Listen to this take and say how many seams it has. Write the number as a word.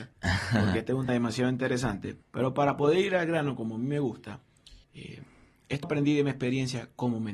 four